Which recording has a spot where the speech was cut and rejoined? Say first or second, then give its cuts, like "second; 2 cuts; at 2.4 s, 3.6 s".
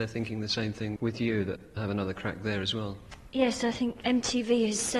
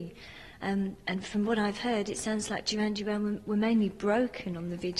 first; 3 cuts; at 1.0 s, 1.8 s, 4.0 s